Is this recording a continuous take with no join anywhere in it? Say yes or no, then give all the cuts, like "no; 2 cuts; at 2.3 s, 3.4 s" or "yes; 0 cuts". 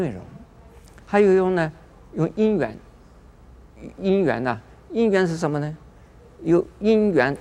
yes; 0 cuts